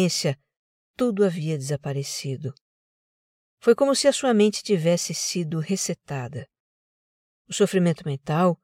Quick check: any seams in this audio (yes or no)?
no